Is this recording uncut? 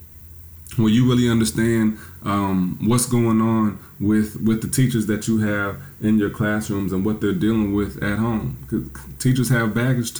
yes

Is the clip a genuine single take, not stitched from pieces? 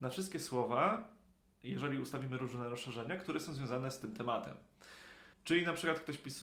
no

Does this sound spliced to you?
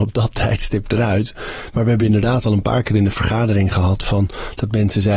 no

